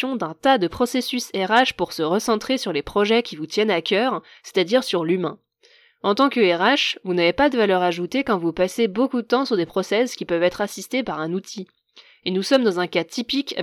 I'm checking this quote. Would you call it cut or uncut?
uncut